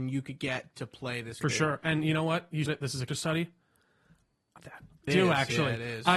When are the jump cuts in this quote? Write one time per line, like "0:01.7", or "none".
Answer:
0:01.4
0:02.7
0:03.1
0:04.6
0:05.1